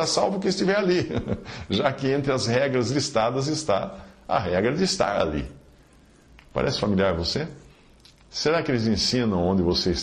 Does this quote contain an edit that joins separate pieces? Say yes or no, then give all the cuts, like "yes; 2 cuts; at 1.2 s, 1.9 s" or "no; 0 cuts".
no; 0 cuts